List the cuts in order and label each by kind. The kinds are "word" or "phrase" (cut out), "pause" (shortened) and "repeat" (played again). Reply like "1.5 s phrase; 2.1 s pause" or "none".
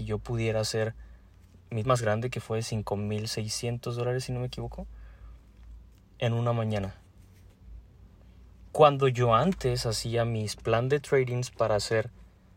1.8 s word